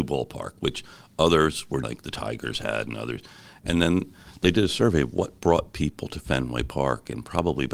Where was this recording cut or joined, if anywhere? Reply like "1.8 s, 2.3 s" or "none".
1.8 s